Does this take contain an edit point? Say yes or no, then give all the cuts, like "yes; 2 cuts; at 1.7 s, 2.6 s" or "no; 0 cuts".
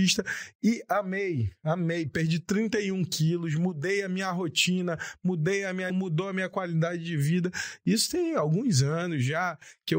yes; 1 cut; at 5.9 s